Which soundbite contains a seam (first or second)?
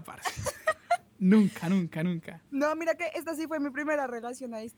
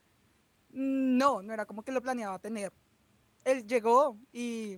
first